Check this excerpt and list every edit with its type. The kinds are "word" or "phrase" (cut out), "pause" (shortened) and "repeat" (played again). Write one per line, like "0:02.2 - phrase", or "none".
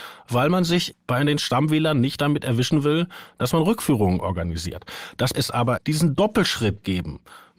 0:00.9 - word
0:05.3 - word
0:05.8 - phrase